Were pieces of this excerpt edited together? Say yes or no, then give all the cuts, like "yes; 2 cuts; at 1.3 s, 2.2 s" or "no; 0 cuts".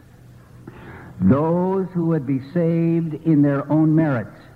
no; 0 cuts